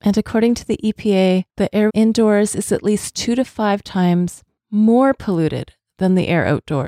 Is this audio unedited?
no; 2 cuts; at 1.5 s, 1.9 s

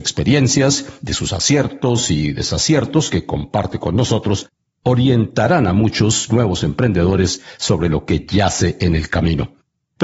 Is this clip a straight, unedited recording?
yes; 0 cuts

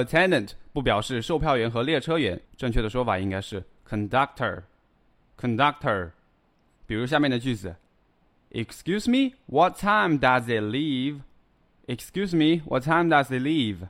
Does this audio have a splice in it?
yes; 1 cut; at 2.4 s

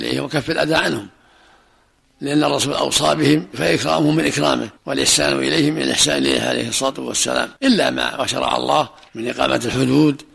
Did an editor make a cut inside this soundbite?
yes; 2 cuts; at 4.8 s, 7.6 s

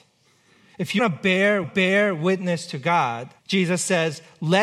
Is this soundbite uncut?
no; 3 cuts; at 1.0 s, 1.6 s, 3.4 s

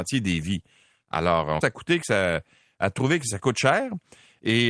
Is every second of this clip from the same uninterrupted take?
no; 1 cut; at 1.6 s

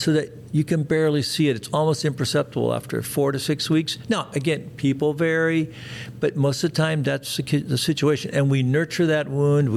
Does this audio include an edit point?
no; 0 cuts

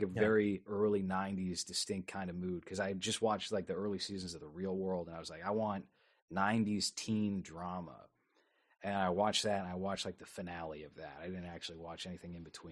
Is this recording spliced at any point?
no; 0 cuts

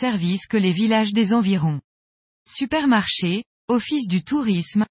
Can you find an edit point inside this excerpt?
no; 0 cuts

